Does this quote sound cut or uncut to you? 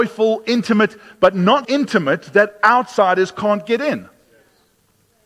cut